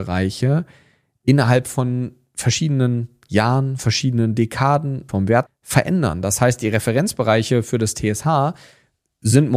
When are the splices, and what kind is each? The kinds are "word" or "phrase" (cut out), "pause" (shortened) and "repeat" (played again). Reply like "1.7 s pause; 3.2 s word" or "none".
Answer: 3.8 s word; 5.1 s phrase; 5.5 s phrase